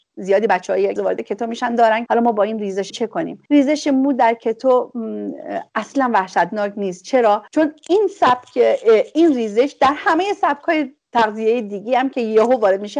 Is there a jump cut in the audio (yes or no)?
yes